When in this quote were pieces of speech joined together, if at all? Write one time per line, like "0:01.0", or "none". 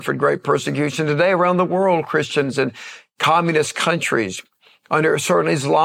none